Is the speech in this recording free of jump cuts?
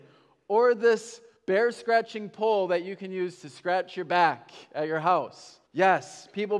no; 2 cuts; at 1.4 s, 5.7 s

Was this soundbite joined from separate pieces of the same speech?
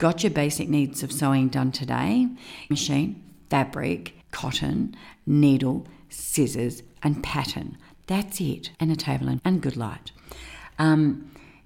yes; 4 cuts; at 2.7 s, 4.2 s, 8.7 s, 9.4 s

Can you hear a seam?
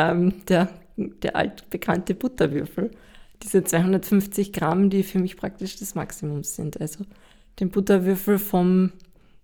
no; 0 cuts

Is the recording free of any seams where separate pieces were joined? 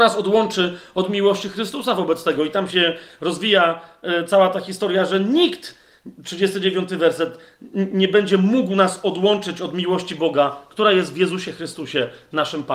yes; 0 cuts

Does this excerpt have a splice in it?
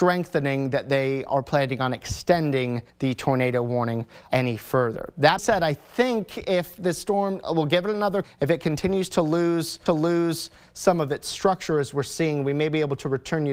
yes; 5 cuts; at 2.9 s, 4.3 s, 5.4 s, 8.2 s, 9.9 s

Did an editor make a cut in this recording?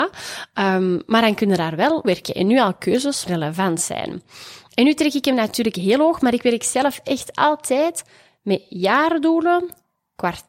yes; 2 cuts; at 2.0 s, 3.3 s

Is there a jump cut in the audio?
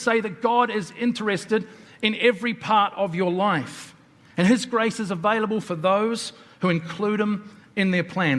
no; 0 cuts

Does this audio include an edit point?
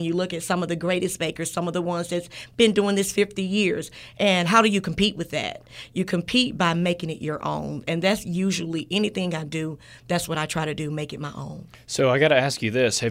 no; 0 cuts

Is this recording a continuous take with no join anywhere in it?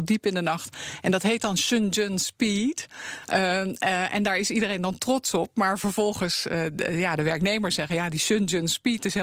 yes; 0 cuts

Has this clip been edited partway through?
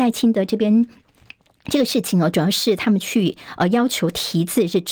no; 0 cuts

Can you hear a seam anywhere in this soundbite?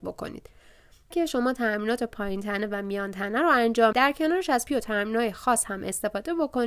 yes; 3 cuts; at 1.1 s, 3.9 s, 4.7 s

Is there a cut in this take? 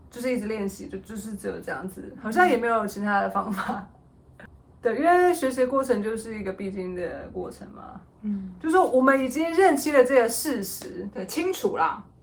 yes; 1 cut; at 8.1 s

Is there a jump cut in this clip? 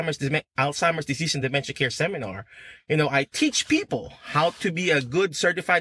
no; 0 cuts

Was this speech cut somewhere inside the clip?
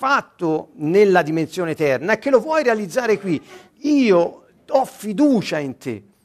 yes; 1 cut; at 3.7 s

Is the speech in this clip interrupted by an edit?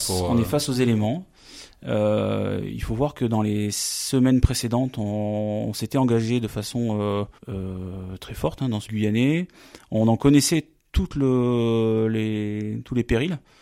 yes; 2 cuts; at 7.4 s, 8.9 s

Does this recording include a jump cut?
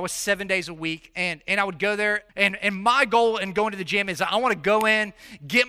yes; 1 cut; at 2.3 s

